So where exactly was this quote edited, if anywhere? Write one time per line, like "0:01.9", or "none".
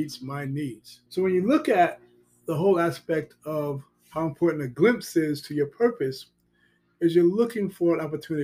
0:01.1